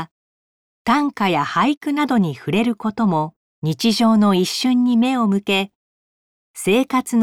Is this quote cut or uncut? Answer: cut